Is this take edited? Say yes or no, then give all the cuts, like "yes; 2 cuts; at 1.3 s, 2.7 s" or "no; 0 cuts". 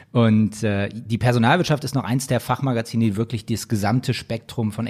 no; 0 cuts